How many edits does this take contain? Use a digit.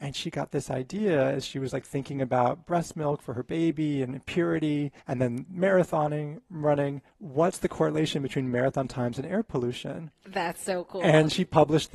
2